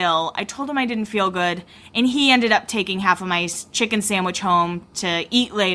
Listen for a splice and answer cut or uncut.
uncut